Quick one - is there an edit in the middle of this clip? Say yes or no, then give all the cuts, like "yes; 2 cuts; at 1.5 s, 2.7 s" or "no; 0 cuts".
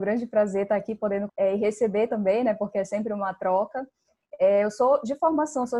yes; 1 cut; at 1.3 s